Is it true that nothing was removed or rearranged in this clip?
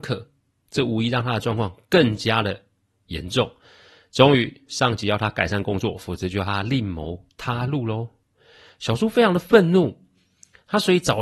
yes; 0 cuts

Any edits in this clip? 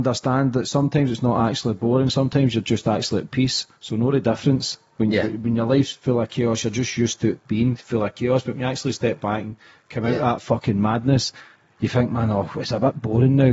no; 0 cuts

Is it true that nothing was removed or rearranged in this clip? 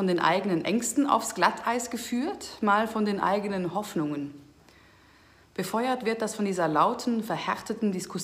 yes; 0 cuts

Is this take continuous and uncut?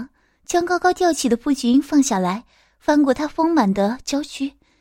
yes; 0 cuts

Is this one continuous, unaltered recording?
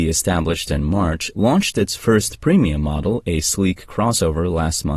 yes; 0 cuts

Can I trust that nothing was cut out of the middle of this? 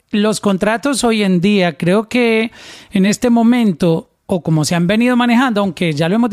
yes; 0 cuts

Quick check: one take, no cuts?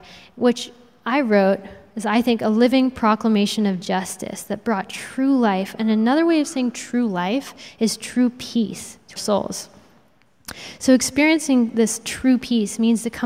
no; 1 cut; at 9.2 s

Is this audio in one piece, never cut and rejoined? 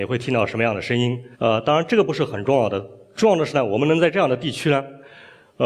no; 1 cut; at 1.3 s

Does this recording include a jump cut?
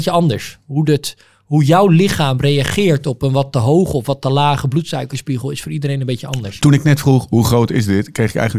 no; 0 cuts

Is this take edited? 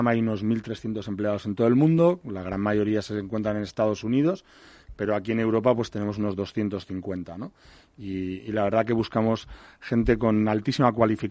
no; 0 cuts

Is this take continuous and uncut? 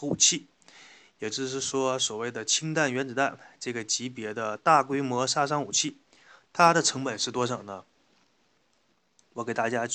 yes; 0 cuts

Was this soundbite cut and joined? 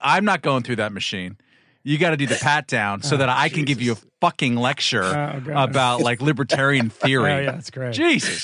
no; 0 cuts

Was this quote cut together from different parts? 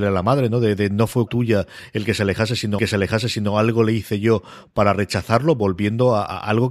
yes; 2 cuts; at 1.3 s, 2.8 s

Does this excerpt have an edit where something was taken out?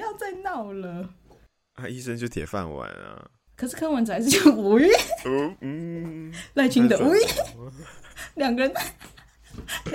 no; 0 cuts

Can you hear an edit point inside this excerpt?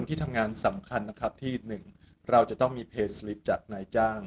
no; 0 cuts

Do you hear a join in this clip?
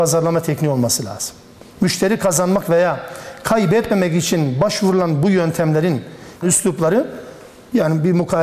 yes; 2 cuts; at 1.7 s, 6.4 s

